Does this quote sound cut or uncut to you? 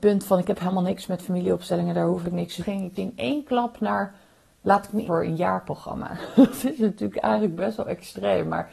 cut